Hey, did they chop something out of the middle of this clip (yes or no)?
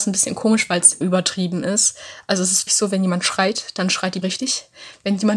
yes